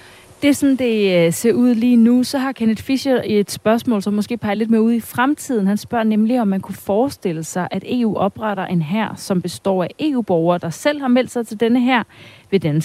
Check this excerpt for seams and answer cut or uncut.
uncut